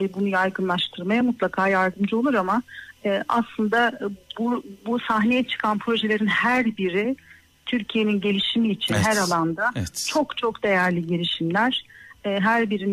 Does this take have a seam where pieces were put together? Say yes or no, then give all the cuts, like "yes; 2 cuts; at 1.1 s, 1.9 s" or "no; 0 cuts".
no; 0 cuts